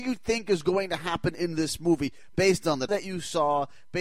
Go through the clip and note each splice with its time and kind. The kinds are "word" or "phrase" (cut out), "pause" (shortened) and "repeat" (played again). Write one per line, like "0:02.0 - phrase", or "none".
0:02.9 - word